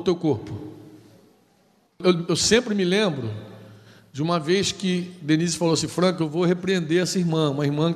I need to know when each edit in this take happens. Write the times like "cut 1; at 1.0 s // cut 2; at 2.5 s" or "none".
none